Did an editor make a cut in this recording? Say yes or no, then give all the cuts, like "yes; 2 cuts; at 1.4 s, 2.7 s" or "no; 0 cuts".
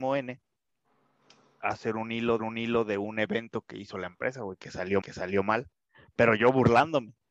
yes; 2 cuts; at 2.4 s, 5.0 s